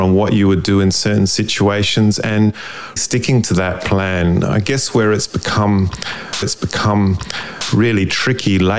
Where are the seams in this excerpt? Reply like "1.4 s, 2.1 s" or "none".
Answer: 3.0 s, 6.4 s